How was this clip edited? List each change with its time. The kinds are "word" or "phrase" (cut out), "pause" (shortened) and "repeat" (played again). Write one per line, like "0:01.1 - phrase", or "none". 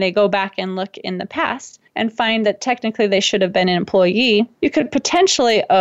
0:01.9 - pause
0:04.5 - pause